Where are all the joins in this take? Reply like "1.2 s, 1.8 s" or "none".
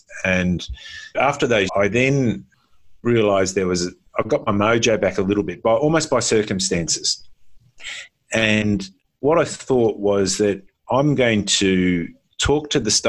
1.1 s, 1.7 s